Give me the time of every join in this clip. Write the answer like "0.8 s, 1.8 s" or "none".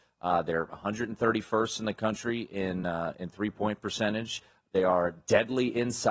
none